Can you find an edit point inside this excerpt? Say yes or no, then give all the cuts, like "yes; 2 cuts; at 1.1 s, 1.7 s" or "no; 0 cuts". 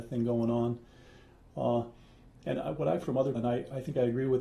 yes; 2 cuts; at 3.0 s, 3.4 s